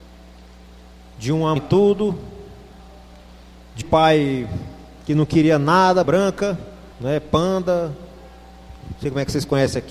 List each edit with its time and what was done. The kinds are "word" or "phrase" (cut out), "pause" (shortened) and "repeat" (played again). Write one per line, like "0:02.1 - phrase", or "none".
0:01.6 - phrase
0:03.8 - word
0:06.0 - word
0:06.9 - pause